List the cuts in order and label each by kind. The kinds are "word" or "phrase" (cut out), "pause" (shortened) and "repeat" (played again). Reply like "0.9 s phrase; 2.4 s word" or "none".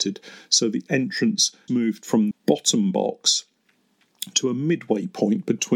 1.7 s word; 2.3 s word